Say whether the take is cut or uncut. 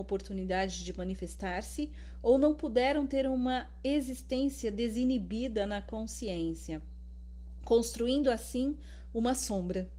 uncut